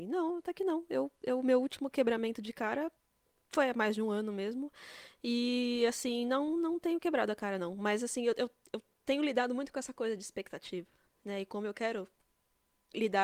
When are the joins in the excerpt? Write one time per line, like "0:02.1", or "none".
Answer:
none